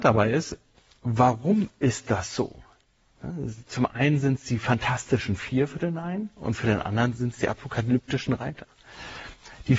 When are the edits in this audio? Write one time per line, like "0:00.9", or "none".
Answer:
none